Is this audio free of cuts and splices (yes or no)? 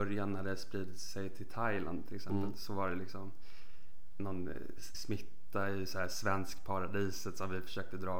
no